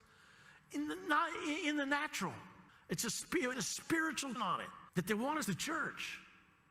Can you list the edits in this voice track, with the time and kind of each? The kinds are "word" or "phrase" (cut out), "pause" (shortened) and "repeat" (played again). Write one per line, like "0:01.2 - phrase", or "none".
0:02.7 - pause
0:03.5 - word
0:04.4 - word
0:04.9 - pause
0:05.4 - word